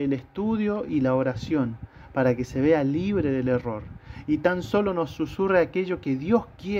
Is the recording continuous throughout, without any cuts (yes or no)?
yes